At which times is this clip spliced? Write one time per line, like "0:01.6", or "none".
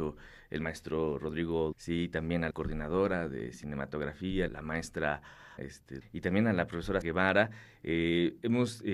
0:01.7
0:02.5
0:04.5
0:05.6
0:06.0
0:07.0